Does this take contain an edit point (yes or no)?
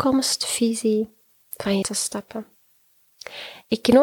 yes